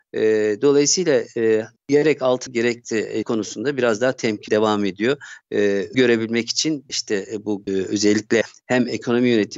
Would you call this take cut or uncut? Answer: cut